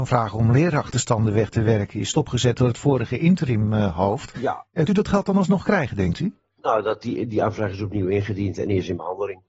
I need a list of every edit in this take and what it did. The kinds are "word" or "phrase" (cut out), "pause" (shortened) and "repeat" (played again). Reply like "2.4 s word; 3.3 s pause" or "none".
4.9 s word

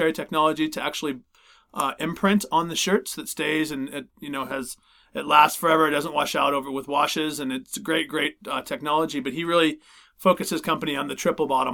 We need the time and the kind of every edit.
none

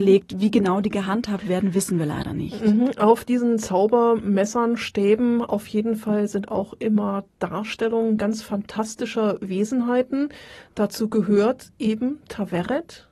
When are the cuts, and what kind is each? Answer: none

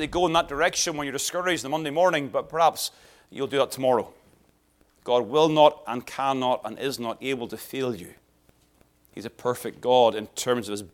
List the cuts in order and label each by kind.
none

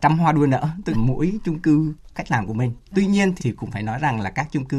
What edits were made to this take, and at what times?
0.9 s word; 2.1 s word; 3.4 s word

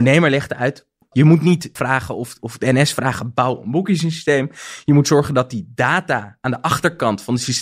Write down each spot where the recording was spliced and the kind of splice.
1.8 s word; 2.4 s word

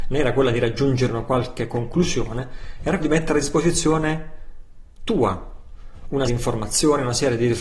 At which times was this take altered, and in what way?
3.0 s word; 6.3 s word

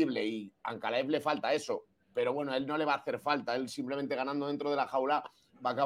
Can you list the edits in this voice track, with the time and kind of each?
none

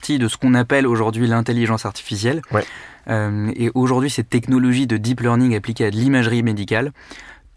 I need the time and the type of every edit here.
none

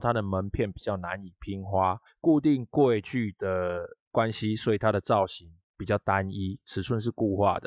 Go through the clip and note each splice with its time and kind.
2.1 s pause

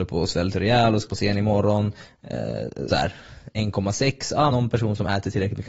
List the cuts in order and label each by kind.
1.1 s word; 2.9 s word; 4.5 s word

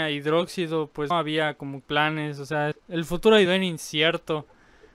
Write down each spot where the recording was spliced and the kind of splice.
1.1 s word; 1.8 s word; 2.7 s word; 3.5 s word

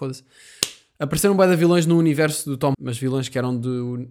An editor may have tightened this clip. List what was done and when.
2.7 s word

